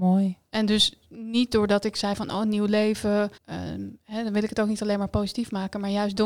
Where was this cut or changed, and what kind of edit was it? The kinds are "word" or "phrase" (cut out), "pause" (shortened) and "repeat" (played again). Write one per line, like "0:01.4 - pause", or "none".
0:03.4 - pause